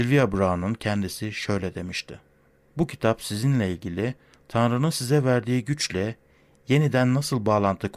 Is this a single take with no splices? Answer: yes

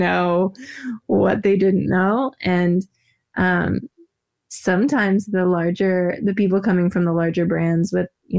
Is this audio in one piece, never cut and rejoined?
yes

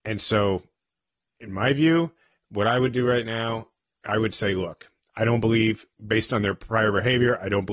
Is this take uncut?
yes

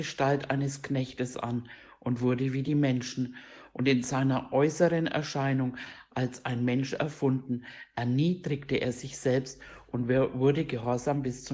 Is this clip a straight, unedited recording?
yes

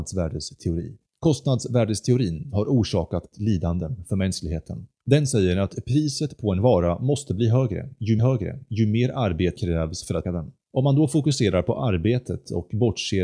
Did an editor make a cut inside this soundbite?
yes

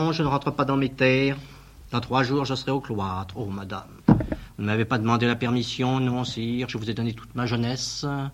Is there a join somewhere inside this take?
yes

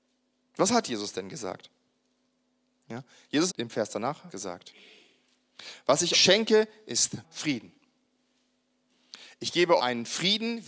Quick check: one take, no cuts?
no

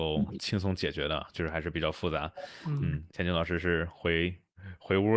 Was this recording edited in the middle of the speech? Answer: yes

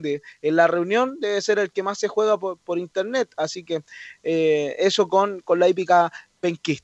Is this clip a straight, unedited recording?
yes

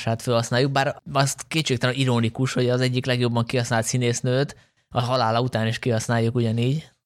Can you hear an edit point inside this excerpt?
no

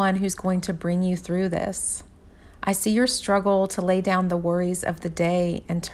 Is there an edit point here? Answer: no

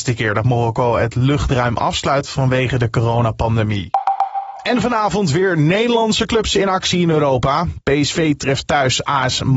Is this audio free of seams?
yes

